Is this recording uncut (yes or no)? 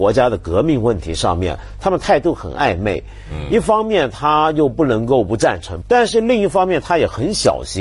no